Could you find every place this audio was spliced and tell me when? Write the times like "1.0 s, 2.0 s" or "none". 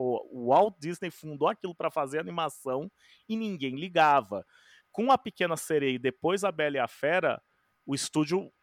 none